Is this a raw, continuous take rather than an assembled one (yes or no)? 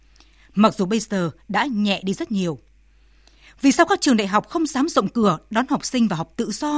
yes